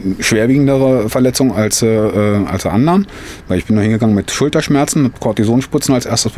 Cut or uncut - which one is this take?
uncut